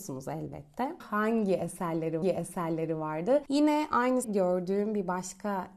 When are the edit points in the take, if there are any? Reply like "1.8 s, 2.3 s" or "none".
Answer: 1.0 s, 2.2 s, 4.2 s